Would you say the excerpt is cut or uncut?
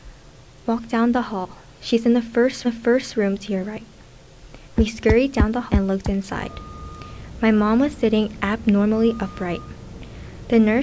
cut